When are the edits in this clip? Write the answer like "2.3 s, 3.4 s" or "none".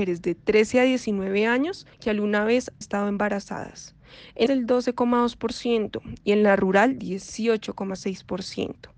1.9 s, 2.8 s, 4.5 s, 7.0 s